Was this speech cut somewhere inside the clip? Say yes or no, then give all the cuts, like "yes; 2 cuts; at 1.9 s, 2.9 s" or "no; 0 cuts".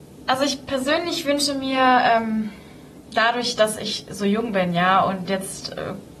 no; 0 cuts